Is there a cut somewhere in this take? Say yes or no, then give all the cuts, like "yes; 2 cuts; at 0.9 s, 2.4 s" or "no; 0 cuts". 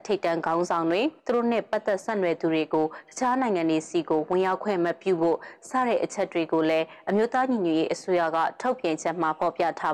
yes; 1 cut; at 1.2 s